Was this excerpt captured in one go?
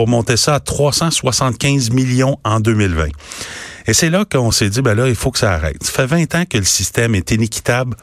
yes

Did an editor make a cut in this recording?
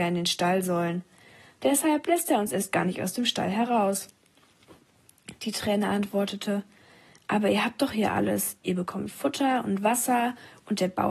no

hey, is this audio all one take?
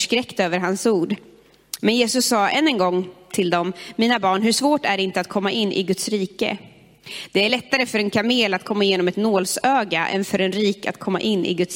yes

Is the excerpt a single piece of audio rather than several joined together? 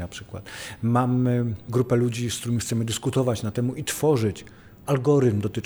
no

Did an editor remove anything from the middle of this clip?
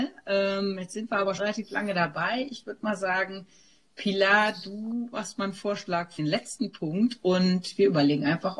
yes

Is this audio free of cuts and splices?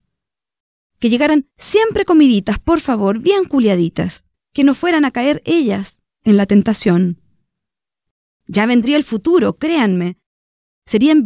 yes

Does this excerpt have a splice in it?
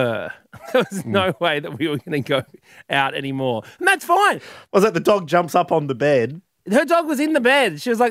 no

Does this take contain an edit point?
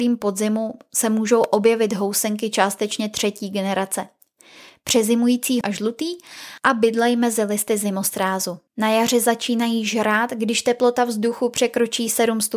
yes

